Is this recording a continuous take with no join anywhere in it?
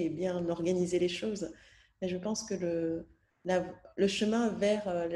yes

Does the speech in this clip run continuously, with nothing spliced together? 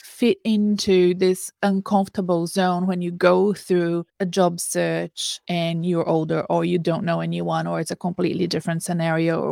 no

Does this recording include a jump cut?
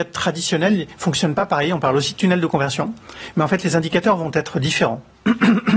no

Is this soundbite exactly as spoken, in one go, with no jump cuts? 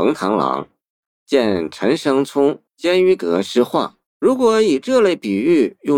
no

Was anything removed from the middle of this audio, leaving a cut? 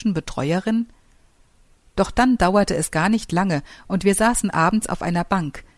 no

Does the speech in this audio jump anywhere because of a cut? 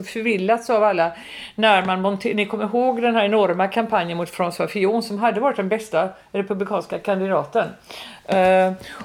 no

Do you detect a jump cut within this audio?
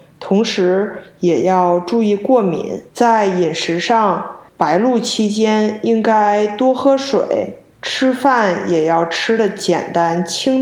yes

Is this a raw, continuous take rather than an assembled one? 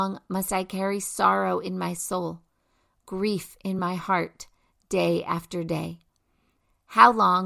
yes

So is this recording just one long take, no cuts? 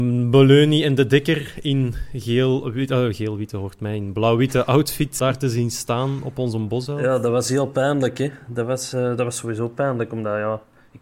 no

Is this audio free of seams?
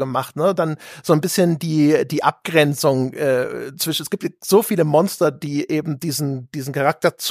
yes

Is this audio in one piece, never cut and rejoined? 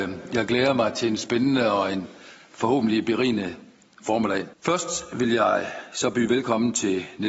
no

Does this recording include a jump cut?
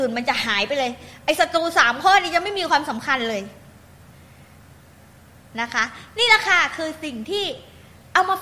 no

